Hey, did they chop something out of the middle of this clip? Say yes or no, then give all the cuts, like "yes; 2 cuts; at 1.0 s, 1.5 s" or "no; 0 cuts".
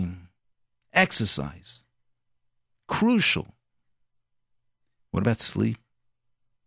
no; 0 cuts